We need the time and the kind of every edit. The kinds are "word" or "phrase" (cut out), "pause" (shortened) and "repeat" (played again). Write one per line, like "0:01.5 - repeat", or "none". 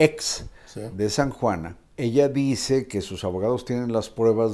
0:01.9 - pause